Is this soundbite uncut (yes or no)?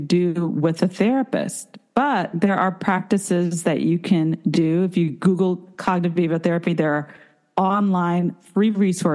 yes